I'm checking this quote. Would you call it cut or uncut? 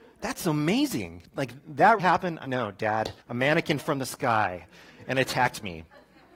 cut